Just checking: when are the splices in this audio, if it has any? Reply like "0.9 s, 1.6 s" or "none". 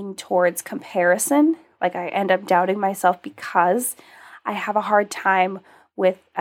none